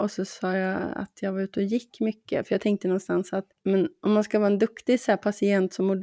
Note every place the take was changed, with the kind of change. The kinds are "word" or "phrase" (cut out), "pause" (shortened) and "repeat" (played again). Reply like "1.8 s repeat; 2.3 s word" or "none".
3.5 s pause